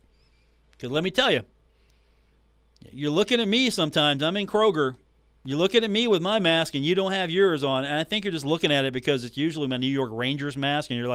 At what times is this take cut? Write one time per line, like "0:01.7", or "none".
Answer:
none